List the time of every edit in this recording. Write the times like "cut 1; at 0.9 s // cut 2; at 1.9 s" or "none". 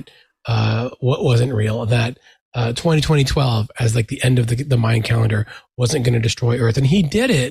none